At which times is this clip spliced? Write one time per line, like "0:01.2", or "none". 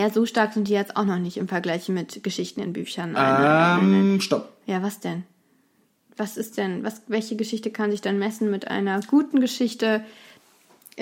none